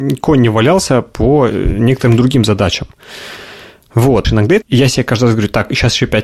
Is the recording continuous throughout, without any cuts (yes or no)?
no